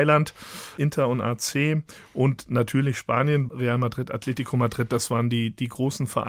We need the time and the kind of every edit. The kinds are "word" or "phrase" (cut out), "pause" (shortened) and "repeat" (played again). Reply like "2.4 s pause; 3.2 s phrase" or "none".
3.5 s word